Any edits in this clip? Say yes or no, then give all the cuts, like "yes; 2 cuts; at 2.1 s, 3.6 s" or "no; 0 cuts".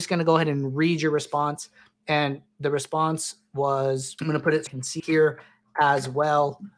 yes; 3 cuts; at 4.2 s, 4.7 s, 5.0 s